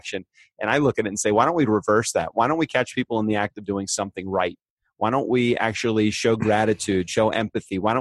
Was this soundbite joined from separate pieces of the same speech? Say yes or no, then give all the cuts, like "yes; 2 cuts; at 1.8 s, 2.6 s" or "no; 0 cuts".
no; 0 cuts